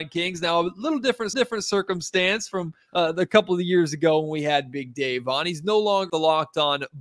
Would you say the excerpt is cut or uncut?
cut